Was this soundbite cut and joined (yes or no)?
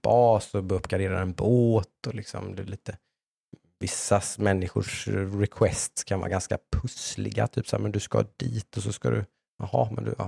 no